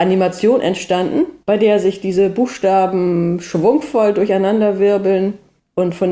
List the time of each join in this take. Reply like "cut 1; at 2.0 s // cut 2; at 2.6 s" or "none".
cut 1; at 1.4 s